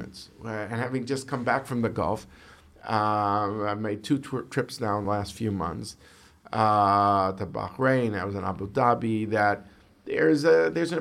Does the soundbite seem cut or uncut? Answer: uncut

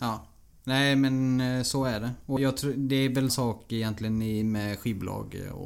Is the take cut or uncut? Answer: cut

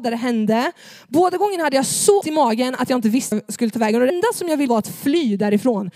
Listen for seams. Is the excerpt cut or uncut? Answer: cut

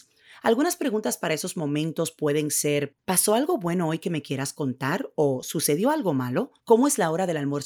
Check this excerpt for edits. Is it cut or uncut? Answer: cut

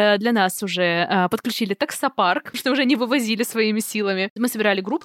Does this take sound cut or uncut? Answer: cut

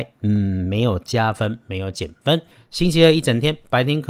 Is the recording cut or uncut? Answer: uncut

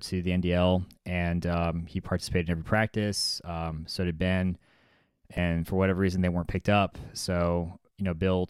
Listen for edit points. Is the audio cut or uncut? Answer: uncut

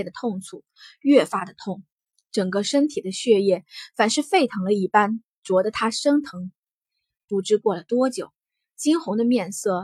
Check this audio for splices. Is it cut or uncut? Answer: uncut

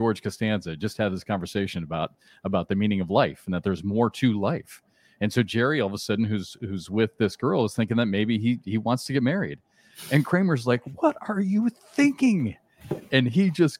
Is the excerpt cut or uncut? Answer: uncut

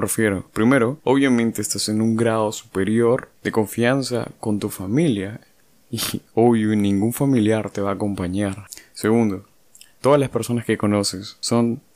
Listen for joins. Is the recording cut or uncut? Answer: uncut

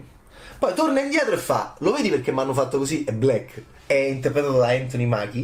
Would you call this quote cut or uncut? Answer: uncut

